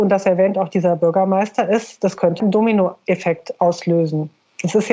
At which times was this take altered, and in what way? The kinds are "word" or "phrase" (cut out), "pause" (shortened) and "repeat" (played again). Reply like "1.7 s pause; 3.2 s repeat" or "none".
2.4 s word